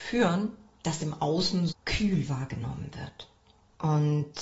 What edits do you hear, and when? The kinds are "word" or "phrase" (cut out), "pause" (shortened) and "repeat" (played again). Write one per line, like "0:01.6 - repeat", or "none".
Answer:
0:01.0 - word
0:01.7 - word